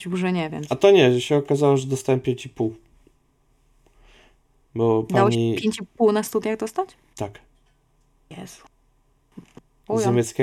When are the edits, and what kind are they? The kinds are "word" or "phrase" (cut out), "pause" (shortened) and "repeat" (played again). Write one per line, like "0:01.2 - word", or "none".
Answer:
none